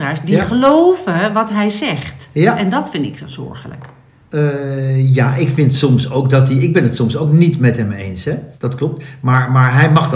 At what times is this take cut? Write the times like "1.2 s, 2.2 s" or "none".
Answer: 8.5 s